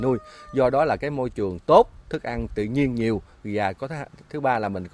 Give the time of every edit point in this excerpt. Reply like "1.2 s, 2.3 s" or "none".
none